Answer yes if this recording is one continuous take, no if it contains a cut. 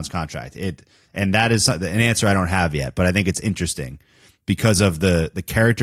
yes